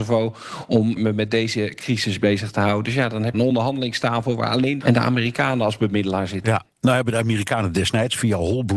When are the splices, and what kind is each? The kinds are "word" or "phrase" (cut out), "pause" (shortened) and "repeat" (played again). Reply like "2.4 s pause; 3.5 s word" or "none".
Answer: 1.0 s word; 3.3 s phrase; 4.8 s word